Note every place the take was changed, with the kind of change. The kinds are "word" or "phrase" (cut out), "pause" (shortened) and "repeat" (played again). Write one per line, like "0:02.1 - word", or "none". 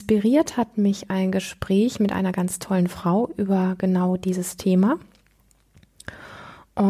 none